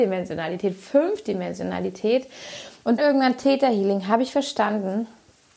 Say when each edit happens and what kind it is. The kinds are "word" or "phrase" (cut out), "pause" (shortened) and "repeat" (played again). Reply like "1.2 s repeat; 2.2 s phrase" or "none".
3.0 s word